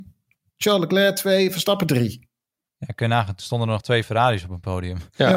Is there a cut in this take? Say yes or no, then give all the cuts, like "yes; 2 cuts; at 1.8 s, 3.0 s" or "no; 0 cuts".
no; 0 cuts